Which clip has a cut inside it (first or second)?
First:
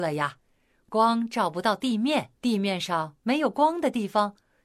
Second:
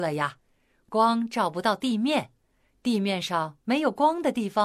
first